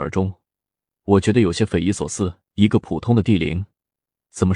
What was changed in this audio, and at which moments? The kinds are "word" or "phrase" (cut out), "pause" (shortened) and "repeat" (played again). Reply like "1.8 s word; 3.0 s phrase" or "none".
2.4 s pause